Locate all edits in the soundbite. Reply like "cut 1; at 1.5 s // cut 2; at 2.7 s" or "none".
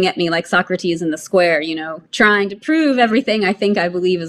cut 1; at 2.1 s